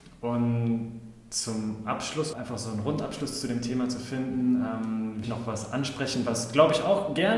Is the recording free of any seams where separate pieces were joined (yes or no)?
no